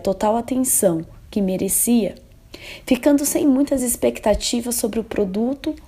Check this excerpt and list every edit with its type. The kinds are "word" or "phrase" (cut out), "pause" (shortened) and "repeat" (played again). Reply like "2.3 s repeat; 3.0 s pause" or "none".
none